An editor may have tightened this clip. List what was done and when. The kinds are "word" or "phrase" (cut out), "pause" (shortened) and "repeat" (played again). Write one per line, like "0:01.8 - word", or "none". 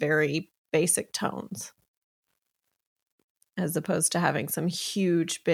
none